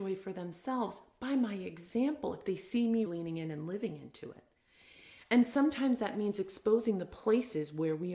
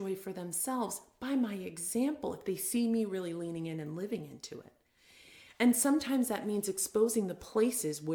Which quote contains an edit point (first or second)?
first